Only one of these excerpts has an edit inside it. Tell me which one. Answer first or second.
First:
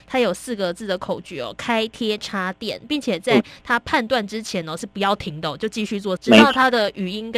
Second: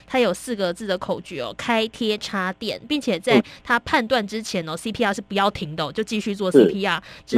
first